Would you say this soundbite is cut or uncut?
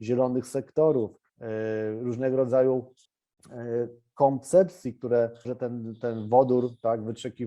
cut